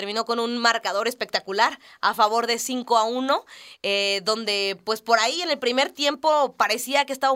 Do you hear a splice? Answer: no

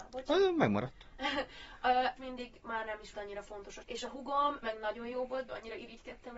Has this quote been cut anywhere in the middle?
yes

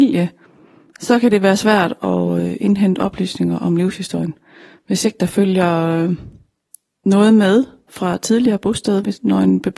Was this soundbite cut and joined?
no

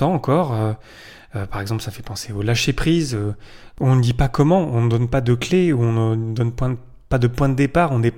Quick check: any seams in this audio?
no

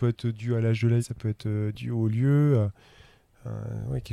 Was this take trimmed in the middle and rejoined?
yes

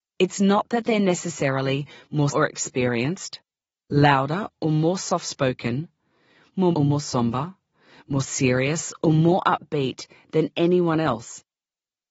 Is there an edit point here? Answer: yes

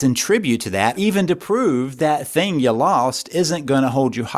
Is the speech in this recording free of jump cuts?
no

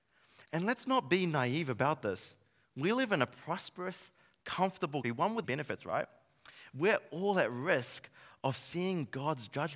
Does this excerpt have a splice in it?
yes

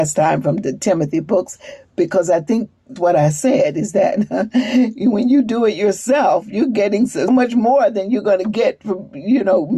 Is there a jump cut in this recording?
yes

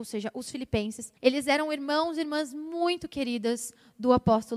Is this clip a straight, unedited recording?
no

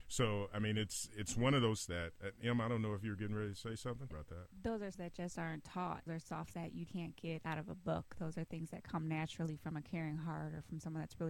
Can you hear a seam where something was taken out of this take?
yes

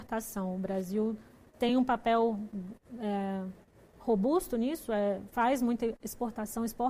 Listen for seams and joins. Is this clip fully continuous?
yes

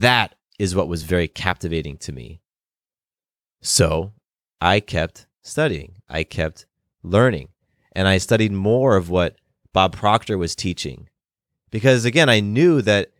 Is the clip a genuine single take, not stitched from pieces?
yes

